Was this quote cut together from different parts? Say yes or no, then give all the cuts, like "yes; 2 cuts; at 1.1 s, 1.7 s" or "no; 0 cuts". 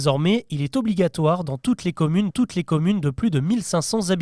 yes; 1 cut; at 2.3 s